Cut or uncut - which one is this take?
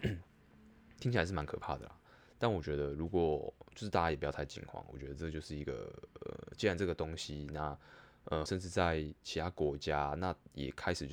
cut